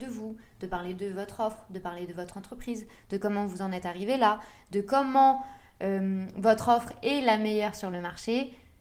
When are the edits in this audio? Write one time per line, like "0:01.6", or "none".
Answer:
none